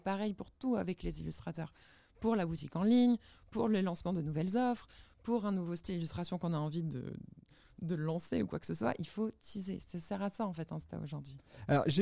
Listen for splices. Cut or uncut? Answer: uncut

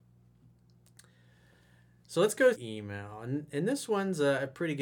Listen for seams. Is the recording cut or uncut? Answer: cut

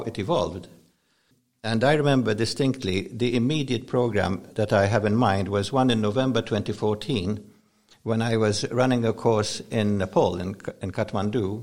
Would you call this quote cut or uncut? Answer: uncut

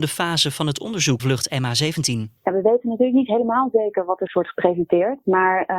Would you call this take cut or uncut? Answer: cut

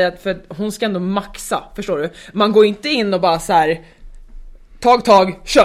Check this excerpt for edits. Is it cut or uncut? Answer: uncut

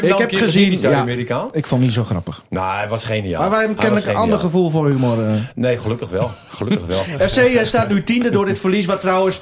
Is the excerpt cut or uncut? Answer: uncut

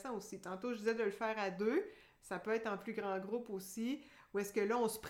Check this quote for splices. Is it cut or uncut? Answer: uncut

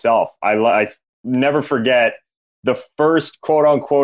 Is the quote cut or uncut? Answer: uncut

